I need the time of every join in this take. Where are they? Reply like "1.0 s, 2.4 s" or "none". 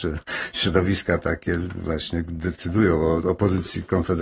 none